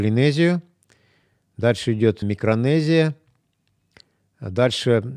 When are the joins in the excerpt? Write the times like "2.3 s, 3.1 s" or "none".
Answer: 2.2 s